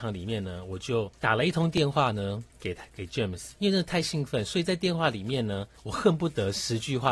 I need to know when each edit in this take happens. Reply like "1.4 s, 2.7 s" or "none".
1.2 s, 2.5 s, 3.6 s, 5.8 s